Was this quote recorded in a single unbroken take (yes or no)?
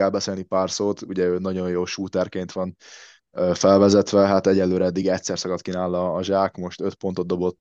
yes